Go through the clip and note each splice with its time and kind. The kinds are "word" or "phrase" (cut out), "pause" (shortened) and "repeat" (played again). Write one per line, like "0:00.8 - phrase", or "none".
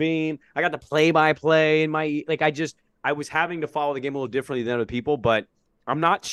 none